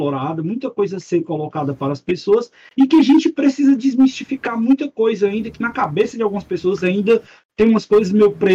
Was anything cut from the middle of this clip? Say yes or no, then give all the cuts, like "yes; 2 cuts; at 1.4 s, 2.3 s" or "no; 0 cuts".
no; 0 cuts